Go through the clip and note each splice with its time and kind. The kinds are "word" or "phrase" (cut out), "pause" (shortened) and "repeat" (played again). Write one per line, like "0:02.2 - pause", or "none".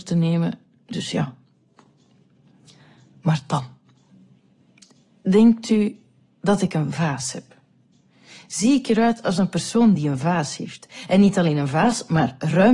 none